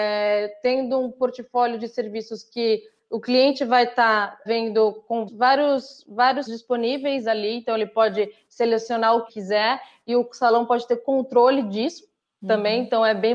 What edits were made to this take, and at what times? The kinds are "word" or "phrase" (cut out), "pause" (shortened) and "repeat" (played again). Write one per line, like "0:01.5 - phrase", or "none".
0:04.5 - word
0:05.3 - word
0:06.5 - word
0:09.3 - word